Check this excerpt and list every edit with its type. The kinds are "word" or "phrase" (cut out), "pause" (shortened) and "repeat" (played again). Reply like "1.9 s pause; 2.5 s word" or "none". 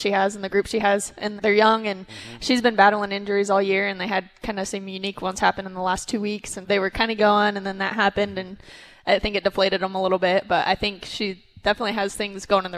1.4 s word; 6.6 s word; 7.2 s phrase